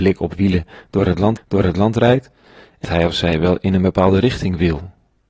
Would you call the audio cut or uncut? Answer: cut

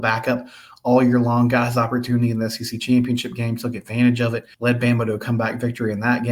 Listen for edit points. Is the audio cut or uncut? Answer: cut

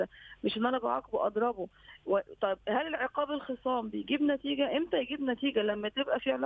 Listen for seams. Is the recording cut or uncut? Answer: uncut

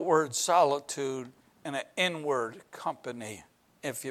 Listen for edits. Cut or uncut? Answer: cut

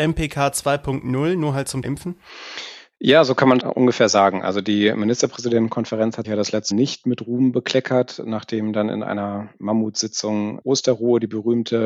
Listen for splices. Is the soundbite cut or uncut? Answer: cut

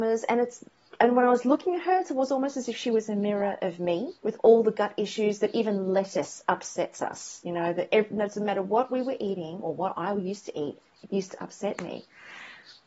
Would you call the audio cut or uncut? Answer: cut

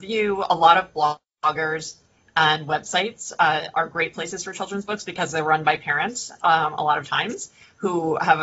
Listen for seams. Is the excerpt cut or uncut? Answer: uncut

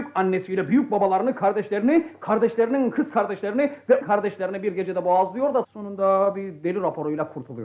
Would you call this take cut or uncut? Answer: cut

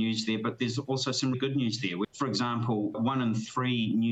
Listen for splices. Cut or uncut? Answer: cut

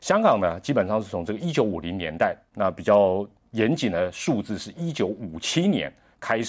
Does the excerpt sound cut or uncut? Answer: uncut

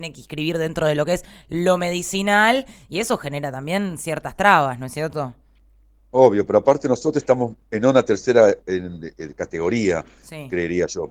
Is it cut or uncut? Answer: uncut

